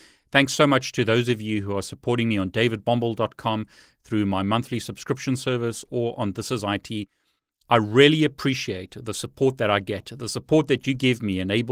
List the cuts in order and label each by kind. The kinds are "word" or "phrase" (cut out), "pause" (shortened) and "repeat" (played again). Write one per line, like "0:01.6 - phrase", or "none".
none